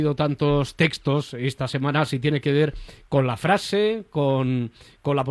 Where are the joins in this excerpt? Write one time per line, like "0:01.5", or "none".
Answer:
none